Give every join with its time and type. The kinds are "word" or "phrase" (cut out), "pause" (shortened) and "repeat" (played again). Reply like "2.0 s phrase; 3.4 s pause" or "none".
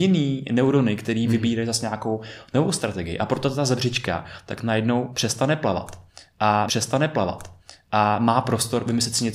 6.7 s repeat